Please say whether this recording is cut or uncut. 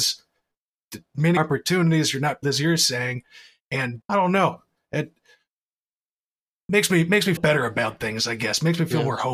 cut